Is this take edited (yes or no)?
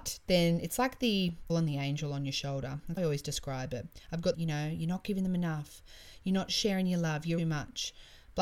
yes